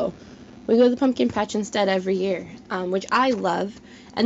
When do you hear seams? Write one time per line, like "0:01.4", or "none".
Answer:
none